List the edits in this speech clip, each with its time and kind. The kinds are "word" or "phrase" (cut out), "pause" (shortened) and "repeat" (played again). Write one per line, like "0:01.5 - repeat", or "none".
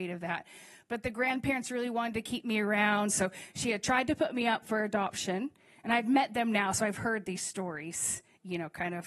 none